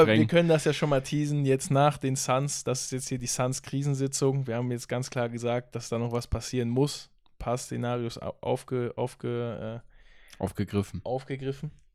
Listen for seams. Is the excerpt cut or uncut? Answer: uncut